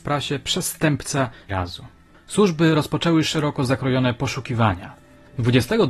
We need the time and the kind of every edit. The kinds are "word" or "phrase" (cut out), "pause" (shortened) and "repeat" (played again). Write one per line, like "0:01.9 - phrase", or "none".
0:01.5 - phrase